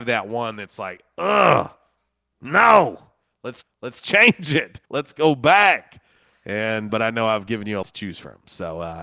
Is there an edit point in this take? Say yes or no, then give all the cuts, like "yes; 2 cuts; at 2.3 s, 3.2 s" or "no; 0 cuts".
yes; 4 cuts; at 3.6 s, 4.9 s, 6.9 s, 7.8 s